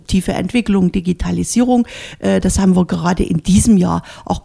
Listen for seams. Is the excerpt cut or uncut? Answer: uncut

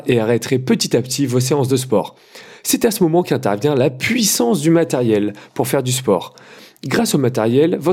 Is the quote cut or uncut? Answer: uncut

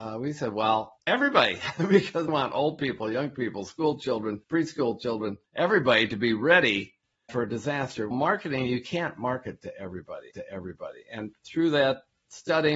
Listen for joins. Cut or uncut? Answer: cut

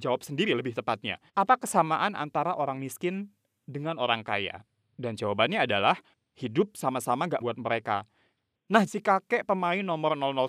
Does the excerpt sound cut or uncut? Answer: cut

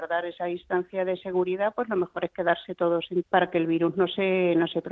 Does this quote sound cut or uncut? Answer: cut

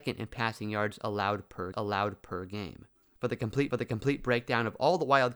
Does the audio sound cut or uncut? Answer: cut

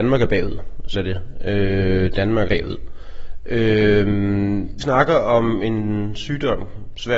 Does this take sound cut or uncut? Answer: cut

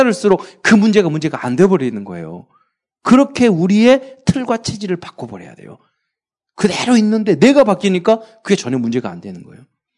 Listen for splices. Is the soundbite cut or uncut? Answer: uncut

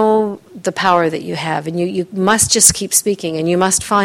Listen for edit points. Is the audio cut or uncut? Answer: uncut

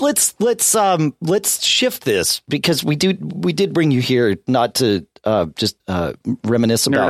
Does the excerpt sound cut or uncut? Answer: cut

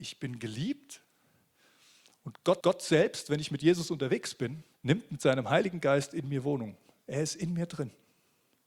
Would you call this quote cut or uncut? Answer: cut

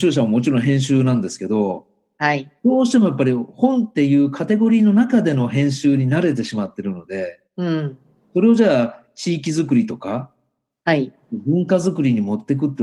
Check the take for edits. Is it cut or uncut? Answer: cut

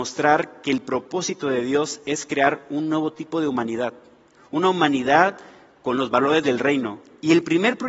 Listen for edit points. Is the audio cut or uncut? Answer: uncut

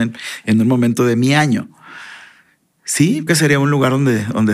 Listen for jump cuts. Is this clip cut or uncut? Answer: cut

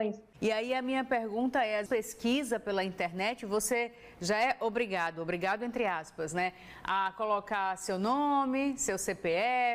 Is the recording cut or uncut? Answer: cut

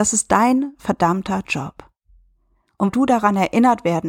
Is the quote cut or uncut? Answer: cut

